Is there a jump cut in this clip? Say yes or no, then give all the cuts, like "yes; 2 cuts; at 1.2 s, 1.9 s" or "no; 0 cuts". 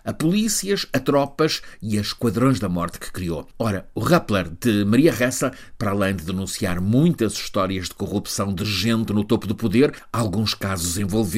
no; 0 cuts